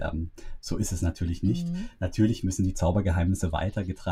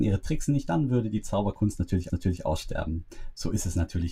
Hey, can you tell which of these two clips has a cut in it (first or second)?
second